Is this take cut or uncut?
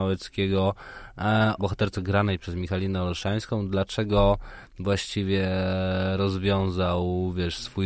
cut